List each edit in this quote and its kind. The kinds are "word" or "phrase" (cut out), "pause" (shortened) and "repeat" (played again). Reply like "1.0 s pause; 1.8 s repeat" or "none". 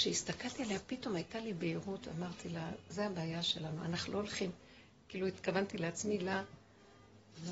none